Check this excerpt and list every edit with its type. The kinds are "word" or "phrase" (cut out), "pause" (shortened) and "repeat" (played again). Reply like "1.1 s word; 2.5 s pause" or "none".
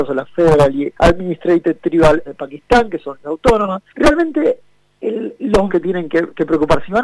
1.0 s pause; 2.3 s word; 3.2 s word; 3.9 s pause; 5.7 s phrase